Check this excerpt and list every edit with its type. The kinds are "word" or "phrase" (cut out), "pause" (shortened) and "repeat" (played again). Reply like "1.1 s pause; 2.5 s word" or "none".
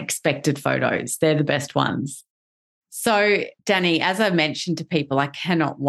3.6 s pause